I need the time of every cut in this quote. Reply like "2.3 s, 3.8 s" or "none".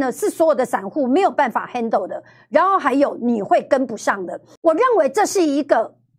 none